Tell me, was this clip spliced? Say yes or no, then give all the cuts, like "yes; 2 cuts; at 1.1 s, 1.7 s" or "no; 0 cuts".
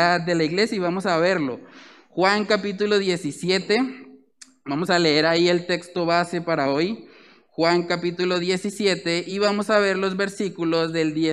no; 0 cuts